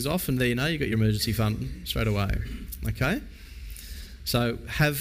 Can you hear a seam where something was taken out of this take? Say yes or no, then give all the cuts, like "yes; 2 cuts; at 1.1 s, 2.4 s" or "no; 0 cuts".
no; 0 cuts